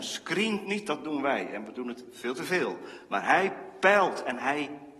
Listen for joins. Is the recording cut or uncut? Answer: uncut